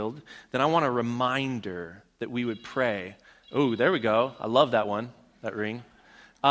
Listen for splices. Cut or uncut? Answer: uncut